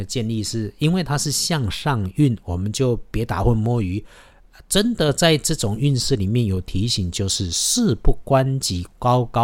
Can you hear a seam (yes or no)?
no